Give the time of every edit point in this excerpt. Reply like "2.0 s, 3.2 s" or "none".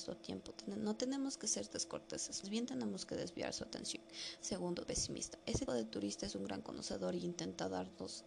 2.4 s, 4.9 s, 5.7 s